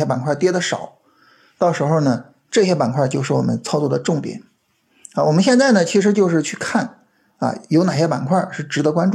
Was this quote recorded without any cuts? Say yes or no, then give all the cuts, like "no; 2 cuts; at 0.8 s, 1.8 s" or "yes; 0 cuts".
yes; 0 cuts